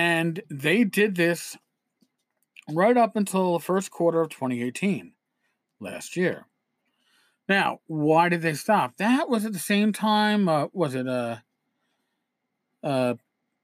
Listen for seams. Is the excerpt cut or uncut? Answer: uncut